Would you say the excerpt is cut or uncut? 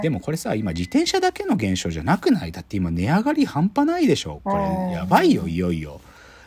uncut